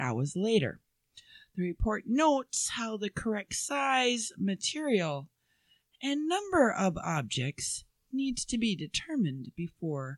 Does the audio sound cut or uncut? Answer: uncut